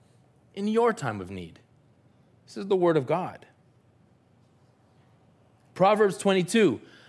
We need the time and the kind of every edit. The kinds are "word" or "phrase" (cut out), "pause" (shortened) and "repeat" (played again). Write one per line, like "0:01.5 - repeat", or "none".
none